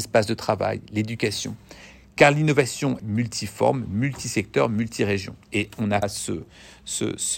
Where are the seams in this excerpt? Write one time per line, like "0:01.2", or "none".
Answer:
0:03.0
0:05.4
0:06.0